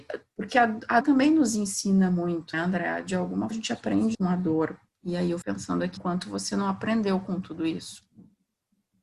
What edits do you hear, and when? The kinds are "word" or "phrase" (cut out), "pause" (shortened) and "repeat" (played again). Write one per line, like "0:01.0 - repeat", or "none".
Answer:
0:01.0 - word
0:02.5 - word
0:03.5 - word
0:04.1 - word
0:04.9 - pause
0:05.4 - word
0:06.0 - word